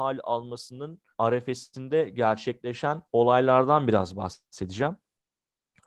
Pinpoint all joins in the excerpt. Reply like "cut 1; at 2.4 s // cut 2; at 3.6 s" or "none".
cut 1; at 1.1 s // cut 2; at 3.1 s